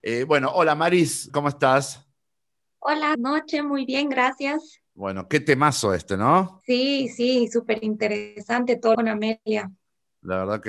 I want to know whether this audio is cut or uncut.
cut